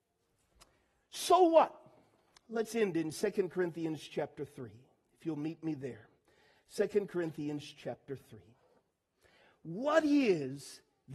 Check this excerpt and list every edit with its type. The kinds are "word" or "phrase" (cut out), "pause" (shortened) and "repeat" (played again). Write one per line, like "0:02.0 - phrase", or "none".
none